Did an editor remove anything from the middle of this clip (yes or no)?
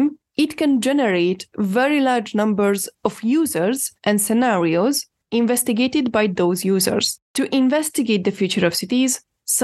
yes